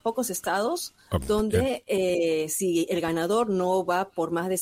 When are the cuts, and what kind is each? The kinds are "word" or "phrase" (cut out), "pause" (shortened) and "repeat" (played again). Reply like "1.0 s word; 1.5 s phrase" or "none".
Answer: none